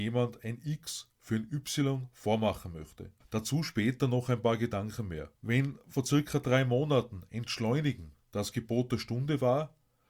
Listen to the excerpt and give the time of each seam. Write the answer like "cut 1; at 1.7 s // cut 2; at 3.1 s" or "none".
cut 1; at 3.2 s // cut 2; at 5.4 s